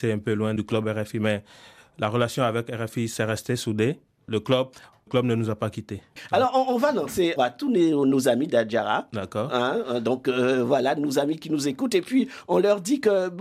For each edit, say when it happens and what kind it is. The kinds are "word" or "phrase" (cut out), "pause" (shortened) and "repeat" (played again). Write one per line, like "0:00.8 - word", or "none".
0:05.1 - phrase
0:07.4 - phrase